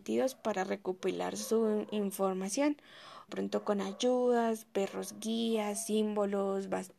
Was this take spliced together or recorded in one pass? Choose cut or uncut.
cut